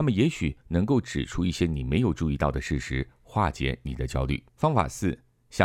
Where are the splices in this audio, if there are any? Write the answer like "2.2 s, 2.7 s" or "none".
4.5 s